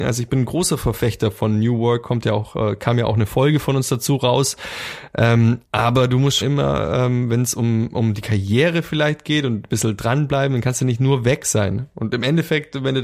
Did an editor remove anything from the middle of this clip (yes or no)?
yes